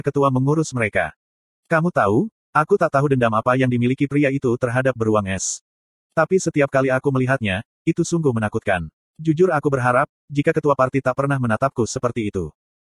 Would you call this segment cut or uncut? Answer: uncut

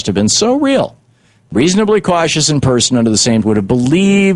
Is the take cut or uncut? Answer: cut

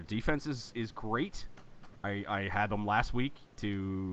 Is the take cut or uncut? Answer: uncut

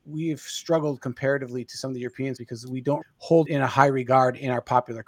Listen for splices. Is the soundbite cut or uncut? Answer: cut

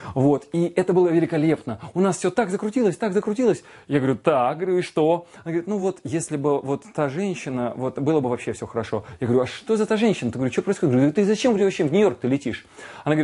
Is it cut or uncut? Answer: uncut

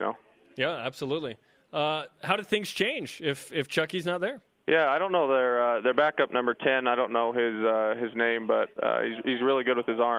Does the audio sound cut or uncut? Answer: uncut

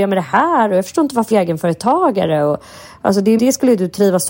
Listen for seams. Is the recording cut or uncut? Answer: cut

